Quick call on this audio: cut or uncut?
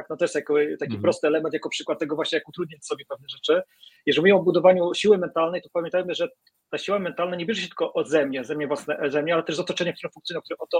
uncut